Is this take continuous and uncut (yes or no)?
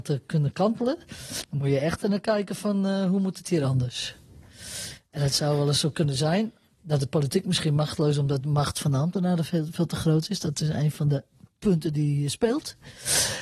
yes